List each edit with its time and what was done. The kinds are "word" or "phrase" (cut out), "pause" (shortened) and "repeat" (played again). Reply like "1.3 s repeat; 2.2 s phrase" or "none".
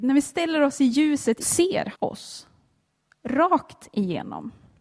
1.4 s phrase; 1.9 s word